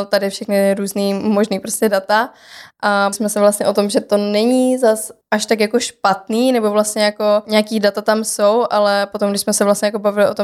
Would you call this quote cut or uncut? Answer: cut